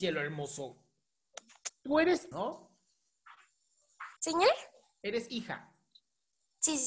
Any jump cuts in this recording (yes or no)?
yes